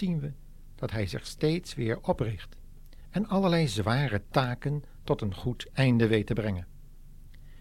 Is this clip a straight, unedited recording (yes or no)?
yes